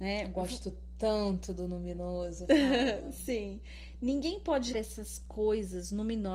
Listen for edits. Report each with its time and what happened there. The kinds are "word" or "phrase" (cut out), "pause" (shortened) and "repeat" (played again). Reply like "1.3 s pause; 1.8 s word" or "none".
4.7 s word

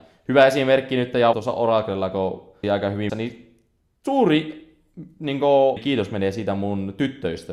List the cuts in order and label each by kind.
1.3 s word; 2.6 s word; 3.1 s word; 5.8 s word

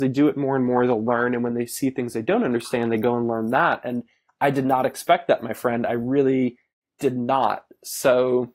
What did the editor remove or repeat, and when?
none

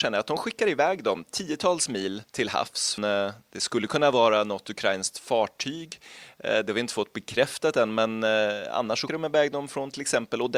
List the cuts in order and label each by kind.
2.3 s pause; 3.0 s word; 9.1 s word

